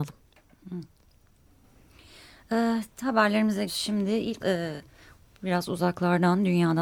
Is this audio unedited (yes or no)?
no